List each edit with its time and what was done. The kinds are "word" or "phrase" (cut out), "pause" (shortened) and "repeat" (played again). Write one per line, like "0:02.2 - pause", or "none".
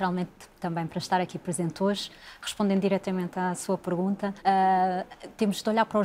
0:04.4 - pause